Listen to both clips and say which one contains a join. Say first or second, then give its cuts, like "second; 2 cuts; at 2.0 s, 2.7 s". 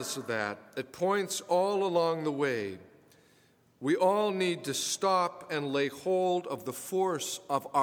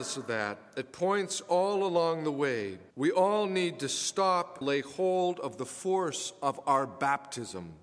second; 2 cuts; at 2.9 s, 4.6 s